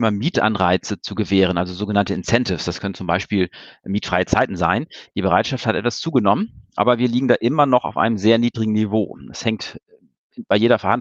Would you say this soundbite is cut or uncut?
uncut